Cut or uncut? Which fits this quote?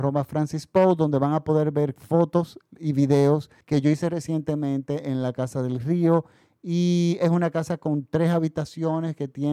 cut